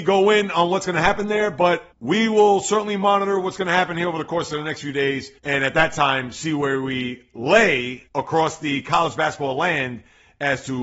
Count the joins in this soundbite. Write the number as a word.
three